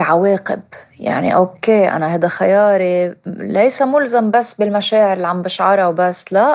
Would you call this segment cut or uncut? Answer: uncut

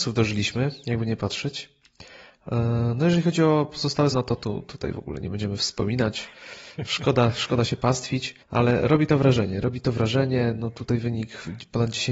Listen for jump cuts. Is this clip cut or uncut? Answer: cut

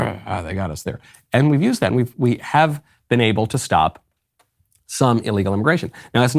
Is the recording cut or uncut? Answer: uncut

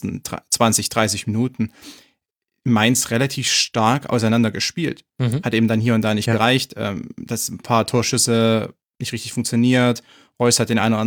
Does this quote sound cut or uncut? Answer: uncut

